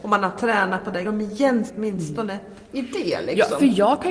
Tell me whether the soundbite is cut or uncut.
cut